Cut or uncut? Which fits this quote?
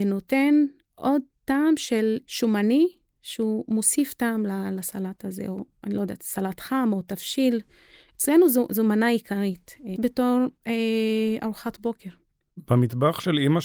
cut